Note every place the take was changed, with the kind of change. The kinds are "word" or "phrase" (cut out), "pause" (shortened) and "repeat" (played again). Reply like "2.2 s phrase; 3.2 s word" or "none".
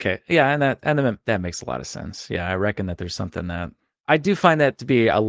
none